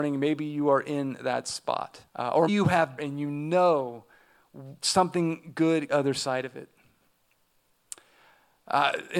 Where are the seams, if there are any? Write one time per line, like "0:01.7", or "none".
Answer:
0:02.1
0:02.5
0:03.0
0:04.8
0:05.9